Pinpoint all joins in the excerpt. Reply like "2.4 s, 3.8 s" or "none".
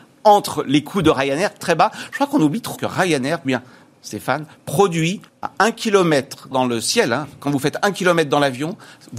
1.6 s, 2.7 s, 3.4 s, 5.3 s, 6.5 s